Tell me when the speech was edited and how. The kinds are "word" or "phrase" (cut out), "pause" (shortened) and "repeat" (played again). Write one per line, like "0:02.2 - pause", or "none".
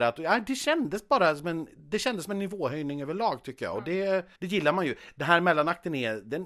0:04.4 - pause

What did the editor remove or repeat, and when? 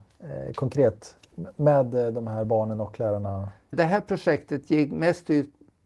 none

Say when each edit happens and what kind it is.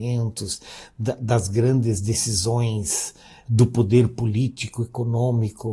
none

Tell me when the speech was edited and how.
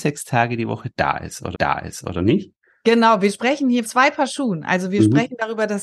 0:01.5 - repeat
0:03.8 - word

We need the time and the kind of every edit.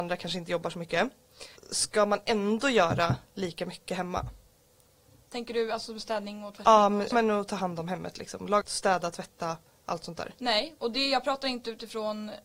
0:01.6 - word
0:07.1 - word
0:08.6 - word

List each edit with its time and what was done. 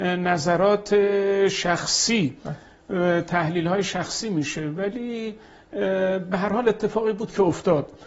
none

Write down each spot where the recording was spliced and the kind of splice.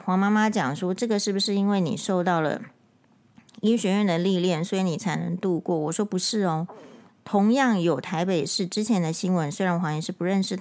0:07.1 - pause

